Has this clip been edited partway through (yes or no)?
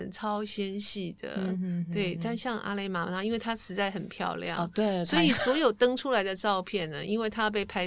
no